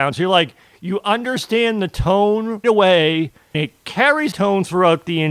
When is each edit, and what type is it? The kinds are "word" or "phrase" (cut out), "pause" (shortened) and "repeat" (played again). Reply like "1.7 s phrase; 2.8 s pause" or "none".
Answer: 2.6 s word; 3.5 s word; 4.3 s word